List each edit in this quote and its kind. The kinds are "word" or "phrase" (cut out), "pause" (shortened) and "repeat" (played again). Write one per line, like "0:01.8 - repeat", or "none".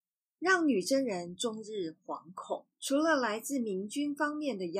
0:02.7 - pause